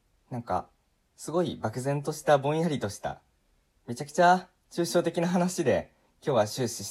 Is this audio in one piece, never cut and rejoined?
yes; 0 cuts

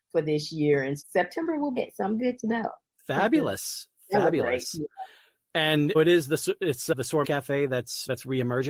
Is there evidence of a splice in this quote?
yes; 4 cuts; at 1.0 s, 1.8 s, 5.9 s, 7.2 s

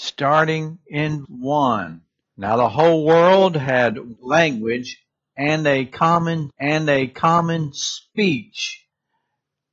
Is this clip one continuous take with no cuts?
no; 4 cuts; at 1.2 s, 2.2 s, 4.2 s, 6.5 s

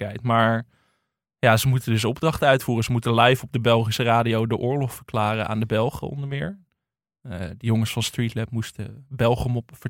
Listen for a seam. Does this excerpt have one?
no; 0 cuts

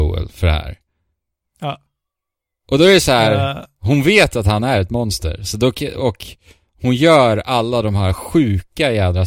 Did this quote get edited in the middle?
no; 0 cuts

